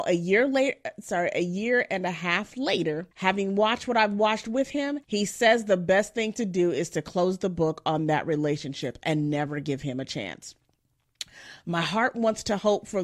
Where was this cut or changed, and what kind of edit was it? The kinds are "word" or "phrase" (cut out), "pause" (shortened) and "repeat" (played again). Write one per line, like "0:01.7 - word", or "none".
0:03.1 - pause
0:05.0 - pause